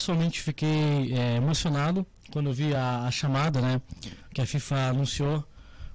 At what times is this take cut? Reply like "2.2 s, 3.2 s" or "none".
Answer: none